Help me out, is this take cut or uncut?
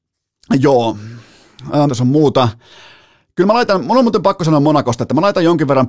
cut